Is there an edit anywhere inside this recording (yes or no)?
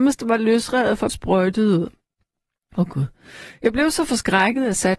yes